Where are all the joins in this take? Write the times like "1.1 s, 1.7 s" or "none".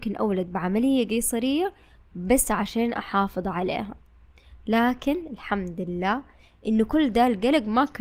none